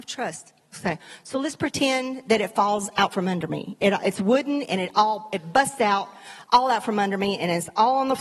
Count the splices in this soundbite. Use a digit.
0